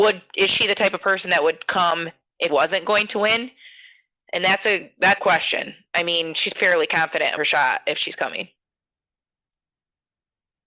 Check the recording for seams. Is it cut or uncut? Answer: cut